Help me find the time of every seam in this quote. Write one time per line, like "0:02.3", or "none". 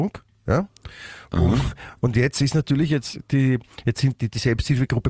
0:04.2